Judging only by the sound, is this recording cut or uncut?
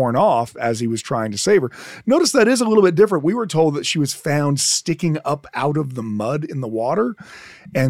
uncut